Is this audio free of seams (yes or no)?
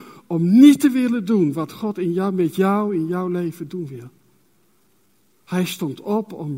yes